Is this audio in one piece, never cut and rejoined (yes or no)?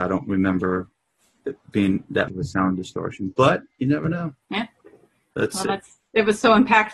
no